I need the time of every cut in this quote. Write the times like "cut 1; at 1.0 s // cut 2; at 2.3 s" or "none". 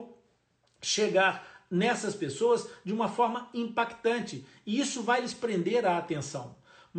none